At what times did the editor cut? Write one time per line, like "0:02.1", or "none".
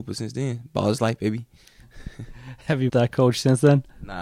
0:02.9